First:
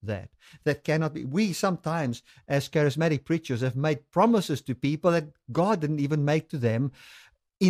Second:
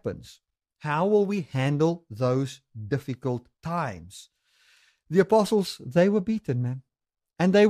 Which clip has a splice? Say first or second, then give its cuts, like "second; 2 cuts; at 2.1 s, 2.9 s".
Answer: second; 1 cut; at 3.5 s